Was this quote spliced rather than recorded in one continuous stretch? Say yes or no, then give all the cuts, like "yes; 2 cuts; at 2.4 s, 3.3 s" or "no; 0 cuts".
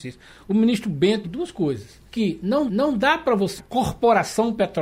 yes; 4 cuts; at 1.2 s, 2.1 s, 2.7 s, 3.6 s